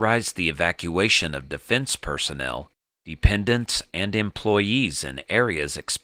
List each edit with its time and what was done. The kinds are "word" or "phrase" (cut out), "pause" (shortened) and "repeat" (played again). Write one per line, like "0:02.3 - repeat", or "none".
none